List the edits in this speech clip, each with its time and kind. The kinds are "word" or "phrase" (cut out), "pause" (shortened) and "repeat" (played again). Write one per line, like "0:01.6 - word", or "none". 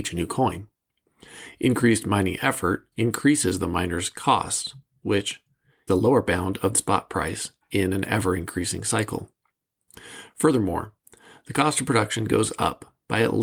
0:02.9 - pause
0:05.9 - phrase
0:06.7 - phrase